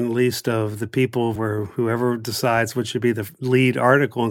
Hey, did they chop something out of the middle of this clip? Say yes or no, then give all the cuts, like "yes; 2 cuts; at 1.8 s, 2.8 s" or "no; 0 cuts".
yes; 2 cuts; at 1.4 s, 3.3 s